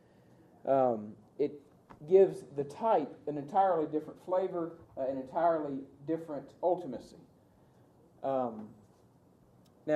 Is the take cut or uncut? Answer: cut